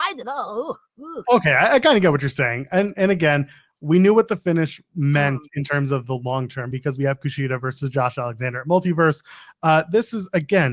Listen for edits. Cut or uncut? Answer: uncut